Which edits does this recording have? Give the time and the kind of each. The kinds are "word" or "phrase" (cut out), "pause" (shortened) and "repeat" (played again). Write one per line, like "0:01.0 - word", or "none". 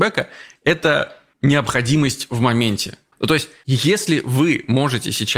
none